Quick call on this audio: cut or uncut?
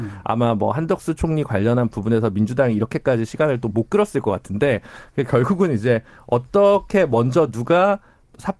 uncut